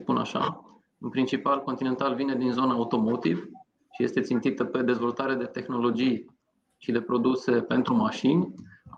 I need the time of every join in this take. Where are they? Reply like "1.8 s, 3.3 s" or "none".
none